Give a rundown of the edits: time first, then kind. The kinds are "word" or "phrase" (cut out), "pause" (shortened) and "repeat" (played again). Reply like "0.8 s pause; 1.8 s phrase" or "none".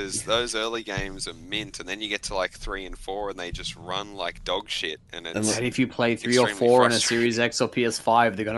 none